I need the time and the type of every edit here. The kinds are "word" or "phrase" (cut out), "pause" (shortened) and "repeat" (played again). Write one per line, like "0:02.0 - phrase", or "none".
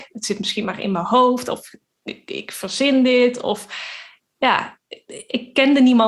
none